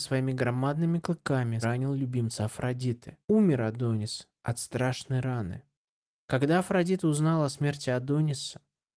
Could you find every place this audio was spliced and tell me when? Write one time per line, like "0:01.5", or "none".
0:01.6
0:03.2
0:05.8